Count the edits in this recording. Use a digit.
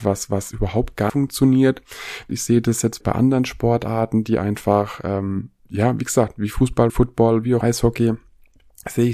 5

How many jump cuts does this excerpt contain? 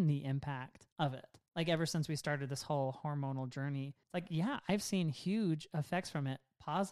3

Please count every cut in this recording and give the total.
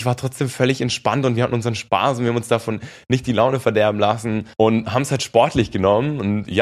1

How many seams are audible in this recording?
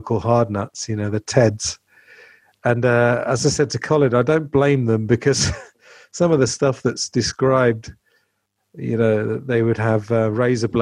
0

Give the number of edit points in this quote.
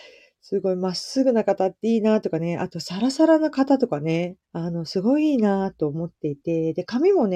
1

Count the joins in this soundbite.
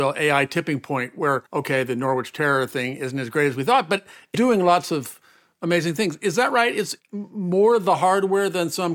2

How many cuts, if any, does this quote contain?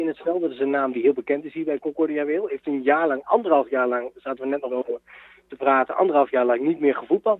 1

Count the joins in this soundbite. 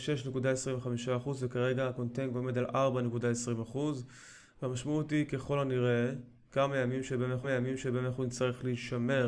1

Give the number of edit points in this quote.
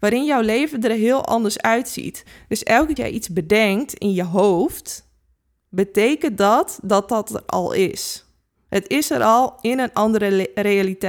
1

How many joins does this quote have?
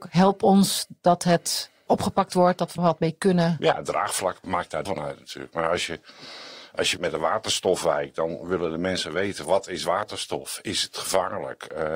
6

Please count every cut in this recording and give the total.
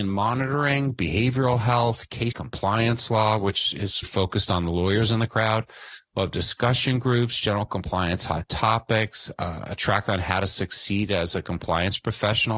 2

